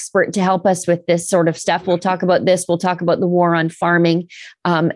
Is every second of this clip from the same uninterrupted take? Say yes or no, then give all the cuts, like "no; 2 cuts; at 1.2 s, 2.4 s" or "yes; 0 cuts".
yes; 0 cuts